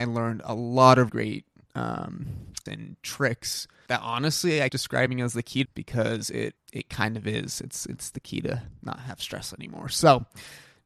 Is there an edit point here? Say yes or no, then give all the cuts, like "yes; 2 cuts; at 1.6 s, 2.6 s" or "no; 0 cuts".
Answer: yes; 6 cuts; at 1.1 s, 2.7 s, 3.9 s, 4.7 s, 5.7 s, 6.6 s